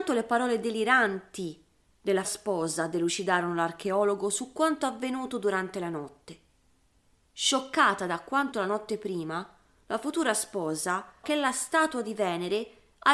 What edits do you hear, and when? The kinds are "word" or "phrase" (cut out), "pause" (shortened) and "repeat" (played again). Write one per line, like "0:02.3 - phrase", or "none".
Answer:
0:02.2 - word
0:08.5 - word
0:11.2 - word